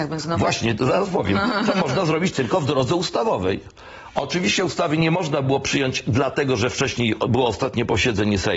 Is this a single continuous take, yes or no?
yes